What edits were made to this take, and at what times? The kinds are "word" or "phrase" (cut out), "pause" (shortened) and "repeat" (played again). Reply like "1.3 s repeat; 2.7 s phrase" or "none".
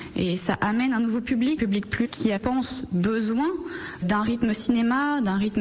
1.6 s word; 2.0 s word; 2.4 s word; 4.0 s word